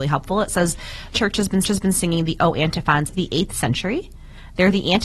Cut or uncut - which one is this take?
cut